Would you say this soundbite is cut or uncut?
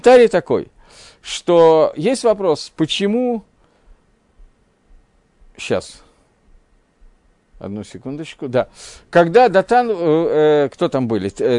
uncut